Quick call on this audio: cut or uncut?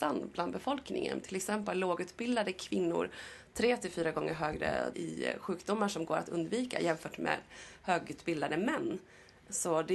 cut